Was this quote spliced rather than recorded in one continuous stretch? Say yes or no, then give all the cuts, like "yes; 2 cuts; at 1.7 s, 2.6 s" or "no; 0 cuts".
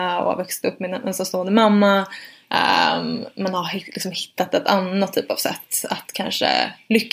no; 0 cuts